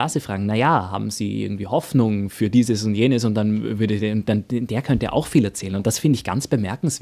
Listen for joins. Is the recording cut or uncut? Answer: uncut